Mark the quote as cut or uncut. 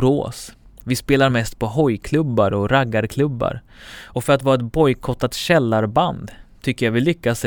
uncut